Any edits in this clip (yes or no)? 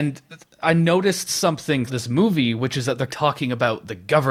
yes